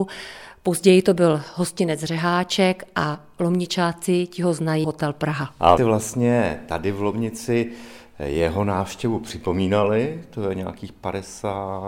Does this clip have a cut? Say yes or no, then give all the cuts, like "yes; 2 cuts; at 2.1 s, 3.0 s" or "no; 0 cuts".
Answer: yes; 2 cuts; at 4.8 s, 5.8 s